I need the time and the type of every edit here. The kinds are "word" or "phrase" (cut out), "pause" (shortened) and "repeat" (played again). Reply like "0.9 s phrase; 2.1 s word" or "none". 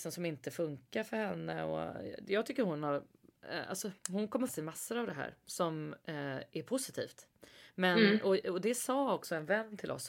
4.0 s pause; 4.5 s phrase